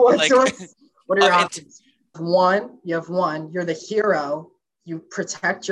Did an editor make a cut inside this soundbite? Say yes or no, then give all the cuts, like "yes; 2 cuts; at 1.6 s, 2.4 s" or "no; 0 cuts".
yes; 1 cut; at 2.1 s